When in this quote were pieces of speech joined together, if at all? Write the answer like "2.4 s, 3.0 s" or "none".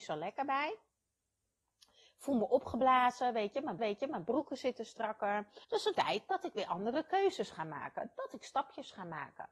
3.8 s, 5.6 s, 5.9 s